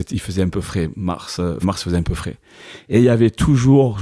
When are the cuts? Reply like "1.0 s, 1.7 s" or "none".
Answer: 1.6 s